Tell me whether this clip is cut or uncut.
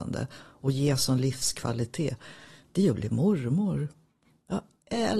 uncut